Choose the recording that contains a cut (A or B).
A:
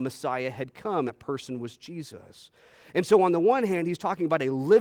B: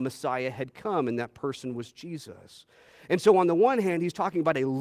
A